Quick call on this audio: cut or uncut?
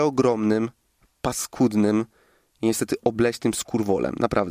uncut